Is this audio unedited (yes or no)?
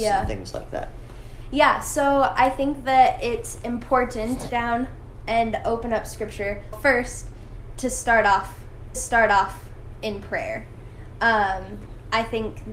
no